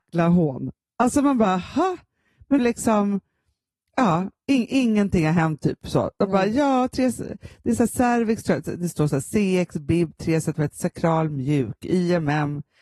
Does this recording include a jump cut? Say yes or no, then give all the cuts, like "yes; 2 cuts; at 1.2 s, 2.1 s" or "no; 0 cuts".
yes; 1 cut; at 2.6 s